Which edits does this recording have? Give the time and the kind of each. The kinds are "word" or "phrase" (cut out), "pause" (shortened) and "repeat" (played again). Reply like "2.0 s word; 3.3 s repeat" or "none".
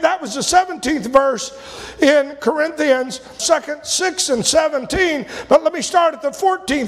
3.4 s word

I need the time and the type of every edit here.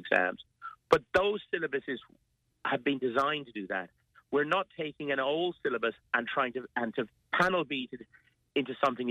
none

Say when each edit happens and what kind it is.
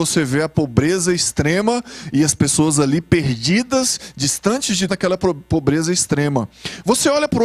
4.9 s word

